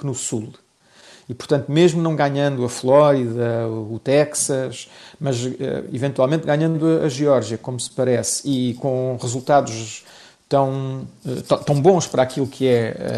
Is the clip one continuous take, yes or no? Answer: yes